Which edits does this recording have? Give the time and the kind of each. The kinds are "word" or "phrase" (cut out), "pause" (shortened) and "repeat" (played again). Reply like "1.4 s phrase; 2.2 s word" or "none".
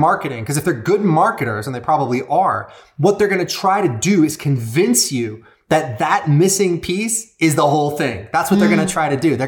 none